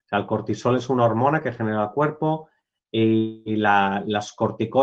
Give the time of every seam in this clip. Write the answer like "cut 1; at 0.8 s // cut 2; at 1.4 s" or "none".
none